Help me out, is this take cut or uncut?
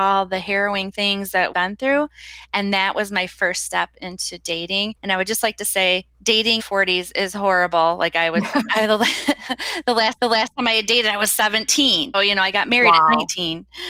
cut